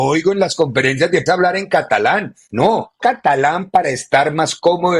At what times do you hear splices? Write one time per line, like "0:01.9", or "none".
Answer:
0:01.3
0:03.0

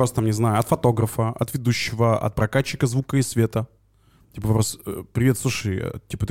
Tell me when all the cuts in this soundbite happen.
none

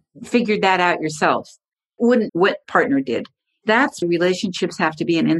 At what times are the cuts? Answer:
0:02.0
0:02.3
0:02.6
0:04.0

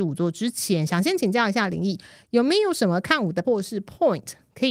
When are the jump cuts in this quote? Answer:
0:03.4

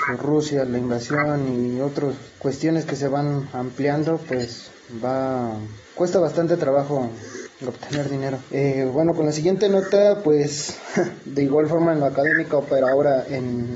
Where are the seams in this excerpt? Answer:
0:02.3
0:05.8
0:08.5

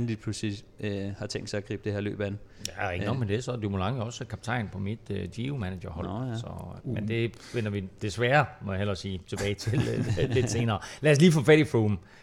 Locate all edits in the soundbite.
0:06.8

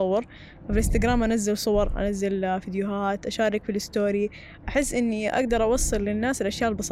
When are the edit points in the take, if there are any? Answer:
none

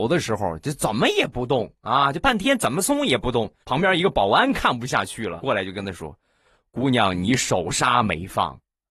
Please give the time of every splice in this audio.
0:03.6
0:05.4

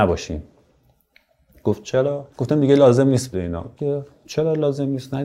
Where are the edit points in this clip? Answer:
0:02.3
0:03.3
0:03.8

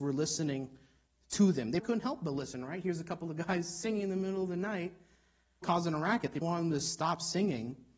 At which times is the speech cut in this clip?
0:01.8
0:05.6
0:06.4

